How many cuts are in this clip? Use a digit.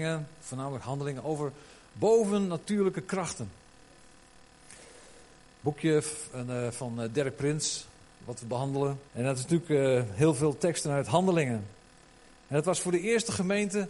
1